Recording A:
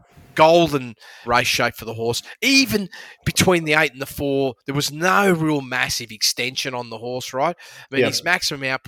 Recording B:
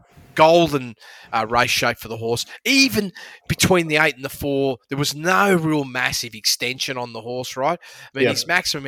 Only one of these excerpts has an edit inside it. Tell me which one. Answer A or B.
A